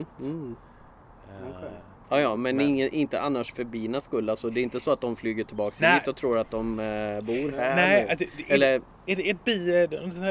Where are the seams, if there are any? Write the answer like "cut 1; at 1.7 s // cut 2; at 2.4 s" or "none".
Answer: none